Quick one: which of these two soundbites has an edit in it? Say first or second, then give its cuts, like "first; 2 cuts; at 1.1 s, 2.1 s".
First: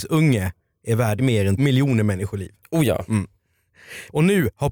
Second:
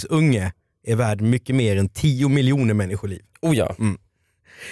first; 2 cuts; at 1.2 s, 1.6 s